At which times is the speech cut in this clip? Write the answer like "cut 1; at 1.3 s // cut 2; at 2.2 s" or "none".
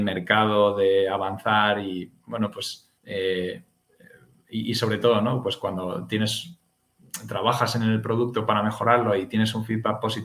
cut 1; at 3.0 s